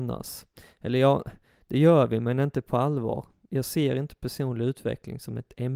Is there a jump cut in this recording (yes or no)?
no